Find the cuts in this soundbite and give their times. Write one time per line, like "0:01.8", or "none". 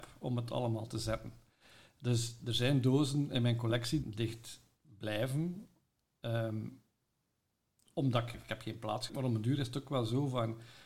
0:04.0
0:08.3
0:09.1